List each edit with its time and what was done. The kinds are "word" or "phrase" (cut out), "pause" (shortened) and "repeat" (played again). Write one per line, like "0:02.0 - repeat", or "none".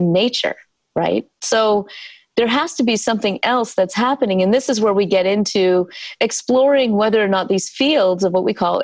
none